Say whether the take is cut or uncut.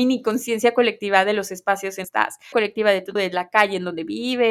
cut